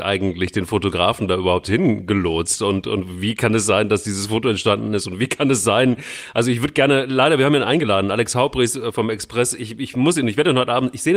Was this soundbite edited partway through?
no; 0 cuts

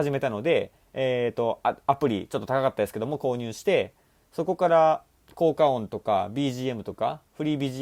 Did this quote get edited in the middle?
no; 0 cuts

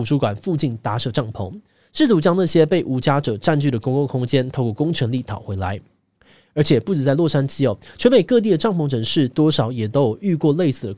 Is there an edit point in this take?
no; 0 cuts

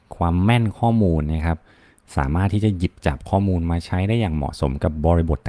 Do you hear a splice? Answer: no; 0 cuts

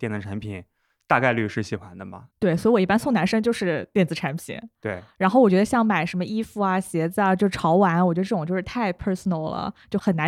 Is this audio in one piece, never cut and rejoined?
no; 1 cut; at 2.3 s

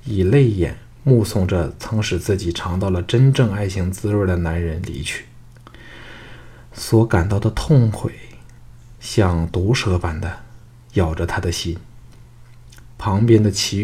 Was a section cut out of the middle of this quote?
no; 0 cuts

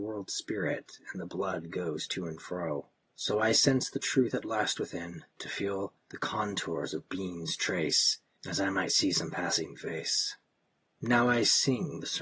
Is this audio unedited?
no; 4 cuts; at 2.9 s, 5.3 s, 6.0 s, 8.4 s

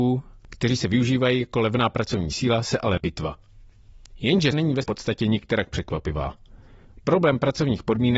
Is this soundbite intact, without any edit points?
no; 3 cuts; at 3.0 s, 4.5 s, 4.8 s

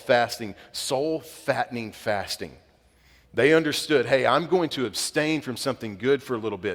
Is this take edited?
no; 0 cuts

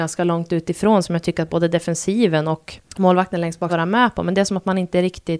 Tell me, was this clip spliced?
yes; 2 cuts; at 2.9 s, 3.7 s

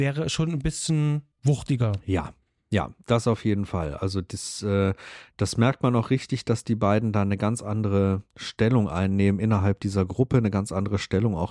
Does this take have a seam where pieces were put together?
yes; 1 cut; at 1.3 s

